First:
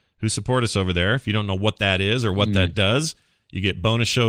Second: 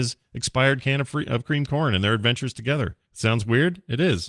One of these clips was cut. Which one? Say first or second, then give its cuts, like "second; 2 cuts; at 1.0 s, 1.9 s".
second; 1 cut; at 3.0 s